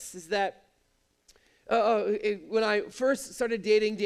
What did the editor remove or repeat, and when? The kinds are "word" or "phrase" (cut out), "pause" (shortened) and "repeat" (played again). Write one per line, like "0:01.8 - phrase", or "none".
none